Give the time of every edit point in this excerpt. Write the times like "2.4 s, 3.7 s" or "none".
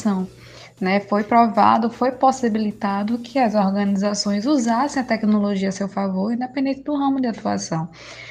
none